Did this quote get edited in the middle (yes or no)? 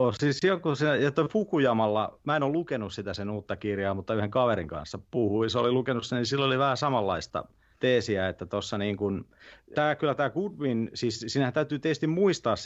yes